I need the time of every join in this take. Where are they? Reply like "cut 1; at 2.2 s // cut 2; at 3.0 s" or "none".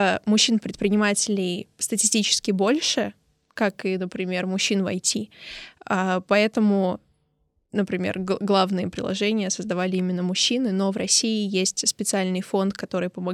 none